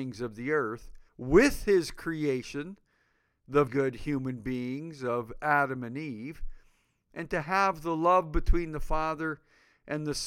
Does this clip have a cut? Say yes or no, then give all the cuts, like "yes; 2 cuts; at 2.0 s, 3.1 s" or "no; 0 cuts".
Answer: yes; 2 cuts; at 1.1 s, 3.7 s